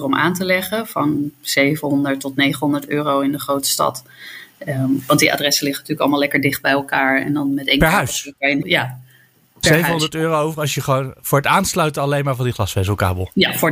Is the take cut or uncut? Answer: cut